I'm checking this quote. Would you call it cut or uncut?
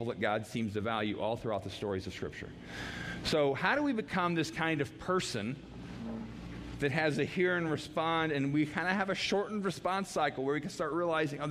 uncut